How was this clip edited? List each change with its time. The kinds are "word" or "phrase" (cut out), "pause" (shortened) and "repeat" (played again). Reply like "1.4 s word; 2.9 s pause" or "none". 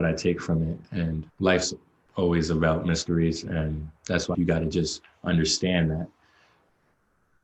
1.3 s pause; 4.3 s word